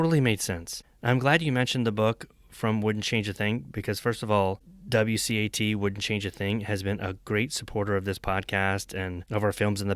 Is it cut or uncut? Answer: uncut